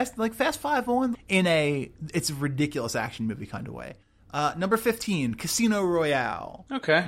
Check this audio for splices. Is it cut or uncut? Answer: cut